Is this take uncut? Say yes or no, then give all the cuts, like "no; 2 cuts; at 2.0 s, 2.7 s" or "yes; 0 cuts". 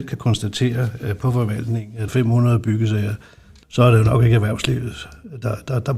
no; 2 cuts; at 2.1 s, 3.6 s